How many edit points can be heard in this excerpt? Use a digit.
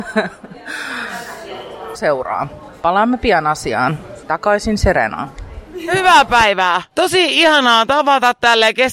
1